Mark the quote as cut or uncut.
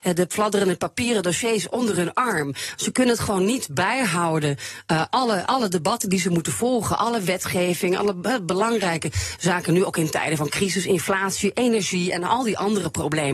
uncut